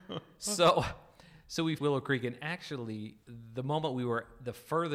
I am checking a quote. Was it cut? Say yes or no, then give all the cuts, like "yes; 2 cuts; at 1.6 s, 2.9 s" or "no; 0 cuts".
yes; 2 cuts; at 1.8 s, 3.2 s